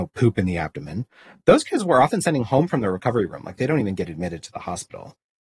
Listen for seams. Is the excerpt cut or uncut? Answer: uncut